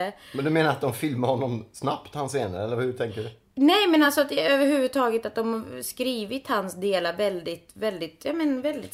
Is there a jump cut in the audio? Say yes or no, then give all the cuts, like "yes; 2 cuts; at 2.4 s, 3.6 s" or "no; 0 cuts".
no; 0 cuts